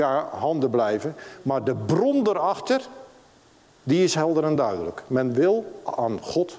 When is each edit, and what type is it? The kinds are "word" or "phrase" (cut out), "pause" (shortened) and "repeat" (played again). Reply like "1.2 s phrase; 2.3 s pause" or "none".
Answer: none